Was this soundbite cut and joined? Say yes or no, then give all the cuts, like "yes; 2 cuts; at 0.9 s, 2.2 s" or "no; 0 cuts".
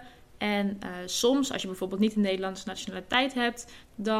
no; 0 cuts